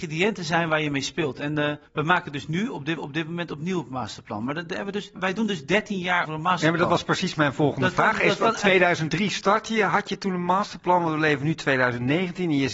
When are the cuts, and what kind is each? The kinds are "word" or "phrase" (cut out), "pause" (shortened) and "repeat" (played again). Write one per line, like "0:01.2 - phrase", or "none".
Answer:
0:01.9 - pause
0:03.0 - repeat
0:05.2 - word
0:06.3 - word